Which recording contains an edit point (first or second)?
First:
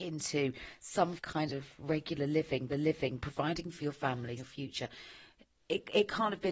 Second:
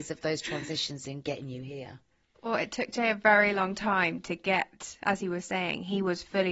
first